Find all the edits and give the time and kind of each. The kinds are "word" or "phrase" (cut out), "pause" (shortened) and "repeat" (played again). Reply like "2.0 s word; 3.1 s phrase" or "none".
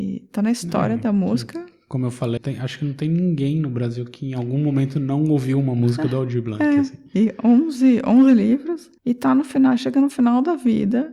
2.4 s word; 9.0 s pause